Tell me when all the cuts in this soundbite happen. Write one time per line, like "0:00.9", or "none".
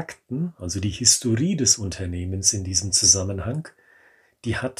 none